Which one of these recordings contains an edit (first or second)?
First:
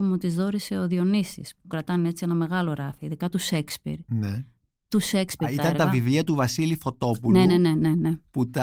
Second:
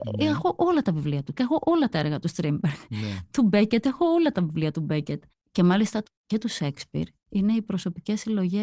second